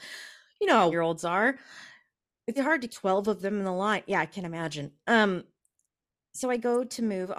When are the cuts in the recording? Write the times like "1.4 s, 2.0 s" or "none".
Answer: 0.9 s, 2.6 s, 2.9 s